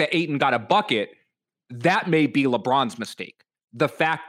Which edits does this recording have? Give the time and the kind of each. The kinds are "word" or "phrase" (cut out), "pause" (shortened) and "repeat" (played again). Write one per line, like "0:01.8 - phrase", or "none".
none

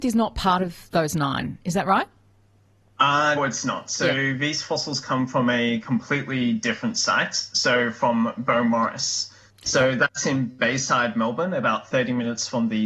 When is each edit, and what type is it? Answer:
0:03.4 - word

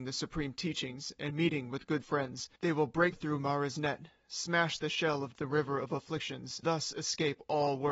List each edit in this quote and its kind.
0:02.0 - word
0:02.6 - pause
0:03.1 - word
0:05.3 - phrase
0:06.6 - word

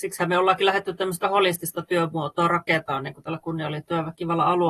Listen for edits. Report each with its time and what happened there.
0:01.2 - word

